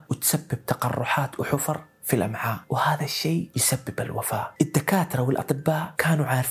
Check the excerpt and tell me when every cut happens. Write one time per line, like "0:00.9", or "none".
none